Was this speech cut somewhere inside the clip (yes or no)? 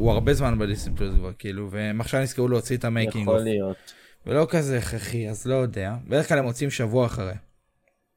no